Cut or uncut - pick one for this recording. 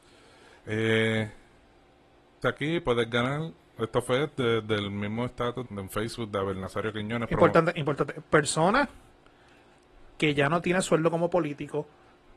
cut